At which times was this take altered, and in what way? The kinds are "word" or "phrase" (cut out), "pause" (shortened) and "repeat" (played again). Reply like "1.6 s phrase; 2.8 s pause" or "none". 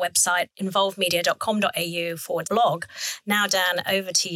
2.4 s word